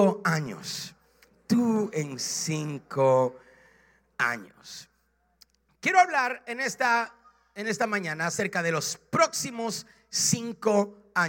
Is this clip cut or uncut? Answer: uncut